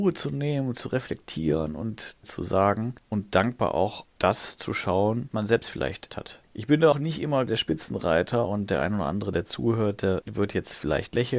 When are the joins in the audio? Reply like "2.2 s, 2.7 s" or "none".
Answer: 2.2 s, 4.1 s, 5.3 s, 6.1 s, 6.9 s, 7.5 s